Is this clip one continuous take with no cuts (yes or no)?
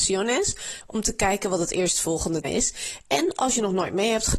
no